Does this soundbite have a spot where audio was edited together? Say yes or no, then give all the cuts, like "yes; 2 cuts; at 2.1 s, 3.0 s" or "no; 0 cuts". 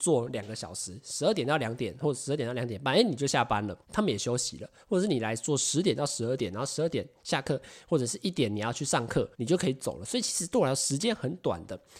yes; 2 cuts; at 3.8 s, 9.3 s